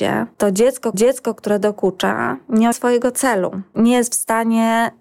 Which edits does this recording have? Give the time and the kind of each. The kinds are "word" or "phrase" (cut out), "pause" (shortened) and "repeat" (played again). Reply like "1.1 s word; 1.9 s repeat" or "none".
0.9 s repeat; 2.7 s word

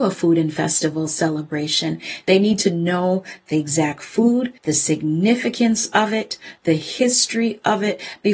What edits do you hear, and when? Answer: 4.6 s pause

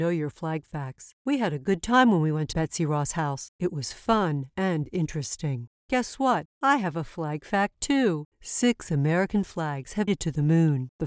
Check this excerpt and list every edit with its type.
2.5 s word; 10.1 s word

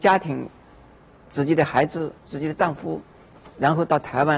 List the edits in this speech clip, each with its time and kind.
2.2 s pause

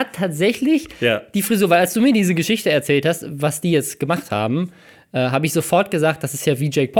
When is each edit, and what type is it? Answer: none

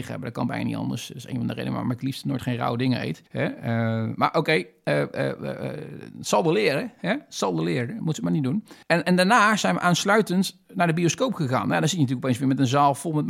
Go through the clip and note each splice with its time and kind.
3.3 s pause; 8.8 s pause

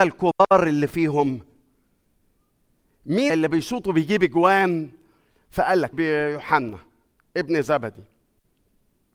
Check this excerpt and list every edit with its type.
3.3 s word; 5.9 s word

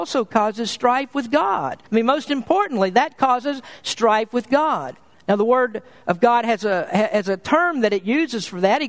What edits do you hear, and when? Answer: 1.9 s pause

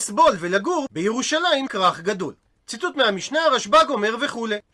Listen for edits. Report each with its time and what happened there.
1.7 s word

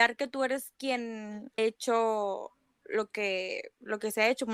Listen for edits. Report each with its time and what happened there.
1.6 s word

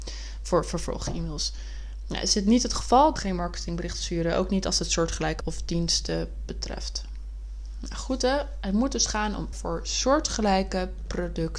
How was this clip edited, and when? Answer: 3.2 s phrase; 5.4 s word; 9.5 s word

